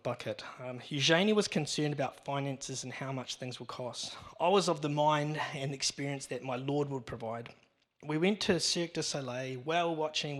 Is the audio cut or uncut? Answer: uncut